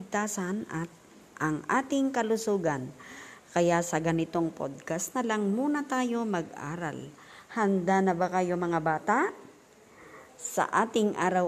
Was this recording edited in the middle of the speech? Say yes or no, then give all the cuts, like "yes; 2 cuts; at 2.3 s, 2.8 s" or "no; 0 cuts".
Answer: no; 0 cuts